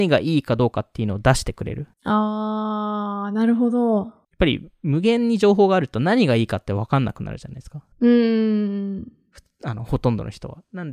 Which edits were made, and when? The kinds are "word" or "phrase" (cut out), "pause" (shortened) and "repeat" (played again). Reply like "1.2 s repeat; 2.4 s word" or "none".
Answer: 1.9 s pause; 4.2 s pause; 7.9 s pause